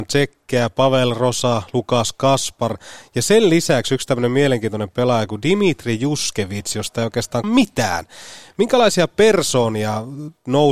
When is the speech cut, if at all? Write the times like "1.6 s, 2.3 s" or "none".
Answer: 7.4 s

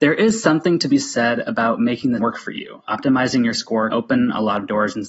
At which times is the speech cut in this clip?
2.2 s, 3.9 s

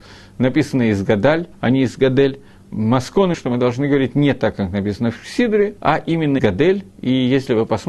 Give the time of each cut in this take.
1.5 s, 3.3 s, 5.8 s, 6.4 s

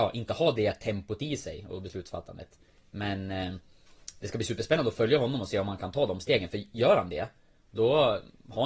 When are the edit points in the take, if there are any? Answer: none

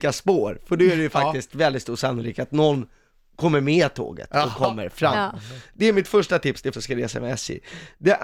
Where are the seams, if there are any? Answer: 6.7 s

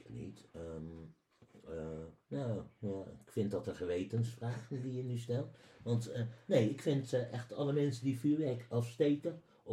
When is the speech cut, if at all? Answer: none

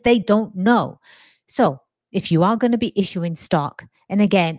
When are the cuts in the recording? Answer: none

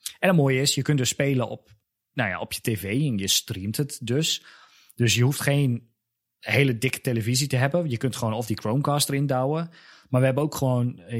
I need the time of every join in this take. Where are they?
none

